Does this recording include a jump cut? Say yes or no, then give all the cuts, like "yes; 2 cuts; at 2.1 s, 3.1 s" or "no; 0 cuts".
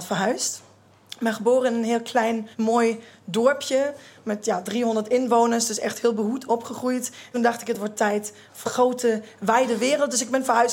yes; 3 cuts; at 2.5 s, 7.3 s, 8.6 s